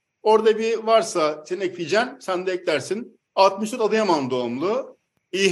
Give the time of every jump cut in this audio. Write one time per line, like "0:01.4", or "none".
0:03.2